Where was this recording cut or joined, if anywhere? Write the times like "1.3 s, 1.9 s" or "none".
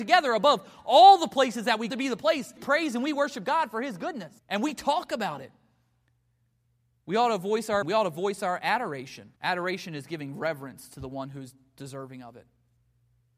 1.9 s, 2.6 s, 4.4 s, 7.8 s, 9.4 s